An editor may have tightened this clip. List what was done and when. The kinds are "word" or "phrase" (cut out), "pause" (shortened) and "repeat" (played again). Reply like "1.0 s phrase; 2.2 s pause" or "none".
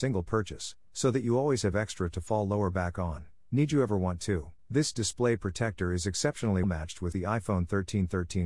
4.6 s pause; 6.6 s word; 7.1 s word

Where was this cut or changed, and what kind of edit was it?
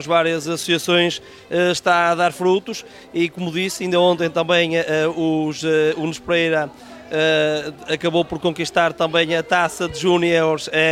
none

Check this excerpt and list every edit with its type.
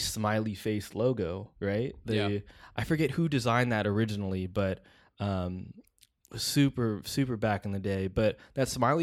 1.6 s pause

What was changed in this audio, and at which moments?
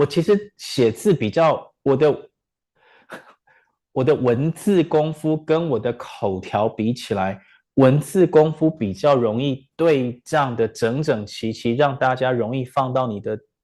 none

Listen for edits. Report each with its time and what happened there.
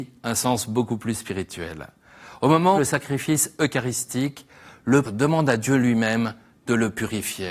2.8 s phrase; 5.0 s word

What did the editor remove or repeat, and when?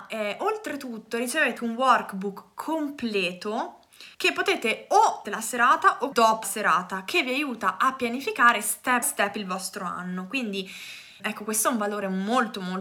1.6 s word; 4.1 s pause; 5.2 s phrase; 6.1 s word; 6.4 s word; 9.0 s word; 11.2 s word

